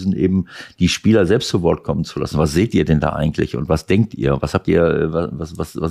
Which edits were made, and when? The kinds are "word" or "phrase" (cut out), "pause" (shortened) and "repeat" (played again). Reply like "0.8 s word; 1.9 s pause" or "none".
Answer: none